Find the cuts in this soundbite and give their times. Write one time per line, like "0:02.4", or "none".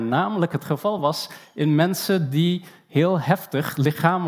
none

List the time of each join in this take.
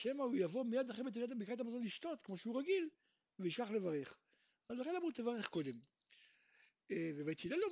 none

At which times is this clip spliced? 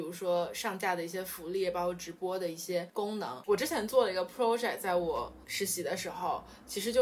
0:05.4

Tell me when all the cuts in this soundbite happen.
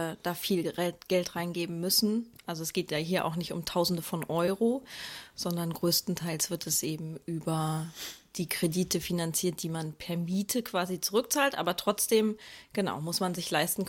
none

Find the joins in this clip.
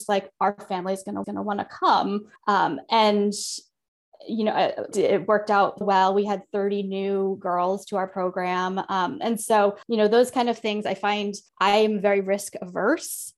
0:01.2
0:02.4
0:04.9
0:05.8
0:09.8
0:11.5

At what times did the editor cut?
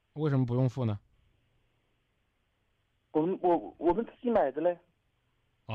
none

